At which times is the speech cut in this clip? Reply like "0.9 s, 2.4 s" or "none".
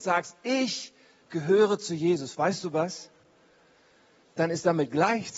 none